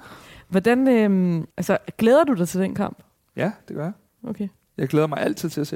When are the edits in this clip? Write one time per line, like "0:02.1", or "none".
0:01.5
0:03.2

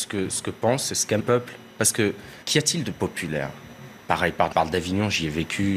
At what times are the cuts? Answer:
0:01.2
0:02.4
0:02.9
0:04.5

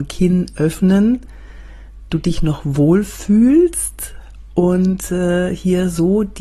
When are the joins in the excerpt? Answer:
0:02.1

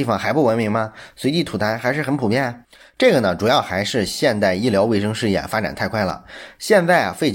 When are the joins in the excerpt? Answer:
none

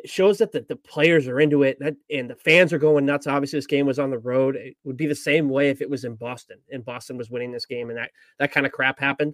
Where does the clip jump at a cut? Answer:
none

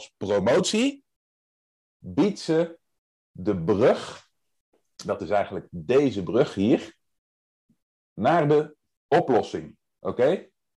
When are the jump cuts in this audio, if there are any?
none

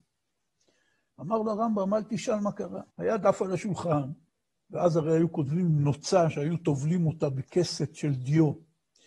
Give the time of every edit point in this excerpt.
0:02.9

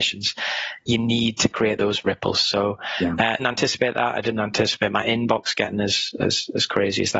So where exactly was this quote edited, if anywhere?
0:03.4

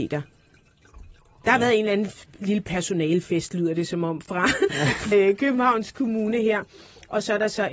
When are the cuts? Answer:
0:05.1

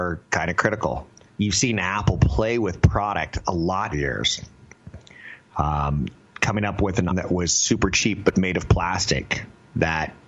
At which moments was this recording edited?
0:01.3
0:03.9
0:07.1

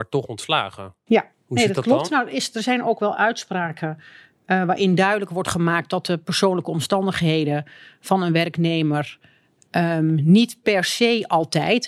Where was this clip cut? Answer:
none

